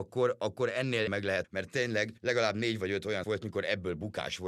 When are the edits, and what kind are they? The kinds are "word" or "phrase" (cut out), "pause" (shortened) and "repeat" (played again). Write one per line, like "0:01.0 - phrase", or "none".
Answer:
0:01.1 - phrase
0:01.4 - word
0:02.2 - pause
0:03.2 - word